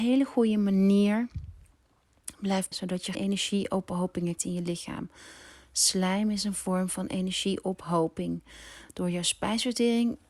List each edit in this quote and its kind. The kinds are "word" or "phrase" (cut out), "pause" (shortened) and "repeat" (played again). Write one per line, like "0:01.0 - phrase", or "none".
0:02.7 - word
0:03.1 - word
0:04.4 - word